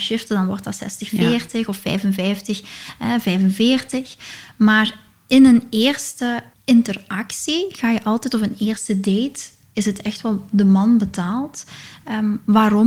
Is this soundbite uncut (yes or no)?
yes